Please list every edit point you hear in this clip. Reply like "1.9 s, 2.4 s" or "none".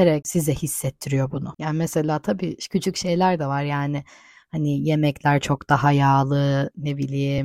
none

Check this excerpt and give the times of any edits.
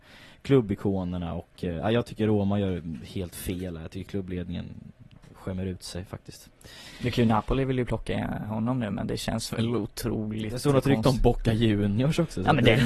none

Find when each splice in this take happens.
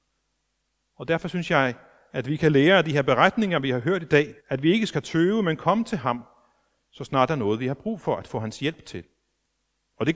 4.4 s

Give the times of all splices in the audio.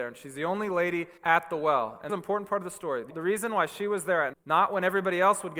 1.2 s, 2.1 s, 3.1 s, 4.3 s

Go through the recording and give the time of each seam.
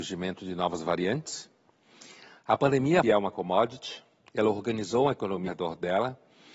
3.0 s, 5.5 s

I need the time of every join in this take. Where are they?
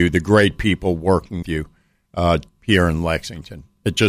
1.4 s, 2.5 s

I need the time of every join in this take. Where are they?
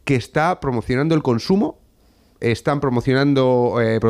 none

